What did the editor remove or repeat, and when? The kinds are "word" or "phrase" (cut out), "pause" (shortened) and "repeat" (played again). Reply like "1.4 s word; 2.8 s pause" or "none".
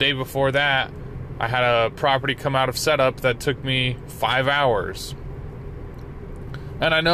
none